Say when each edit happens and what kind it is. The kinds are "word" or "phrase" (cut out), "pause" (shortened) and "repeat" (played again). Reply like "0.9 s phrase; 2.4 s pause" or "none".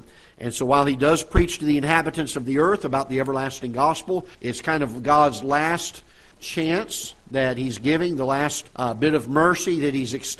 4.3 s pause; 6.3 s word; 8.7 s pause